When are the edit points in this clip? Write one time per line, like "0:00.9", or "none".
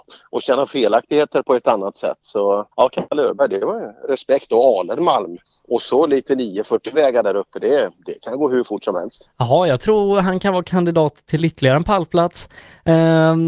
0:01.4
0:02.7
0:05.4